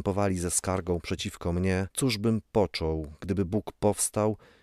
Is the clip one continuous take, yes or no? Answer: no